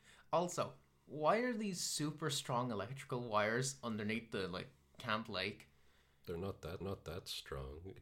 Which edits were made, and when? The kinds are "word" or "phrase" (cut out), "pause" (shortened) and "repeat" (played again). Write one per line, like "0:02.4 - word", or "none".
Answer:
0:06.8 - repeat